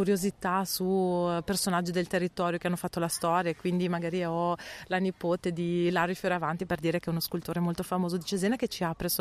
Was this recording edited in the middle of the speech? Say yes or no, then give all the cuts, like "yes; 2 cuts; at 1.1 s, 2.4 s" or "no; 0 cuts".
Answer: no; 0 cuts